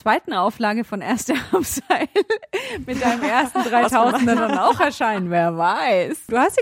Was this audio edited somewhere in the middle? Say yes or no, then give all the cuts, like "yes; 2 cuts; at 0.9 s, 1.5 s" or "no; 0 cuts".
no; 0 cuts